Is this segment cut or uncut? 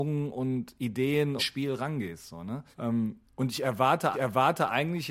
cut